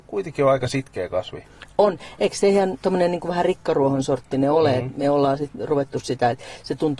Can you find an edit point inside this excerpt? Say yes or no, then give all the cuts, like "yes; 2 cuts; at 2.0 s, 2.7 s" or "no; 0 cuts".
no; 0 cuts